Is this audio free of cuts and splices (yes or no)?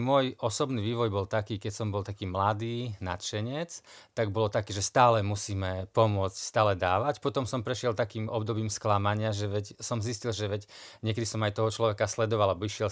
yes